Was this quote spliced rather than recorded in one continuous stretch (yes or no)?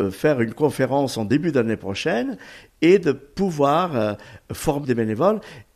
yes